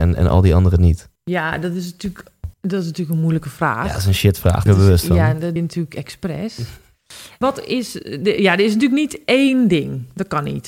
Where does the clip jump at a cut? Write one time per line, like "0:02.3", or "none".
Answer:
0:01.2
0:02.5
0:04.7
0:05.6
0:07.4